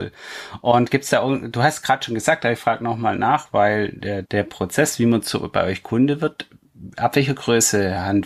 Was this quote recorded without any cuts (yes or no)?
no